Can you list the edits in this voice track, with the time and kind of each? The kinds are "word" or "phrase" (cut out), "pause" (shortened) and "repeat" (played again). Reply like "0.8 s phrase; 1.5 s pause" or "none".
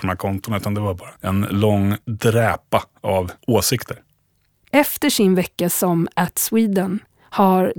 1.2 s pause; 2.0 s pause; 3.4 s pause